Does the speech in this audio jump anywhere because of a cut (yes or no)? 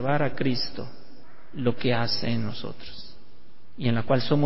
no